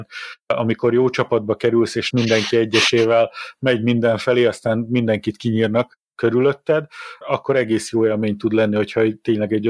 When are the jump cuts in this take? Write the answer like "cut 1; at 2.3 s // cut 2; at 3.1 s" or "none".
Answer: cut 1; at 2.1 s // cut 2; at 7.2 s